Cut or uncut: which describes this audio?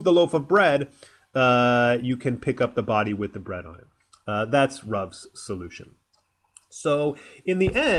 uncut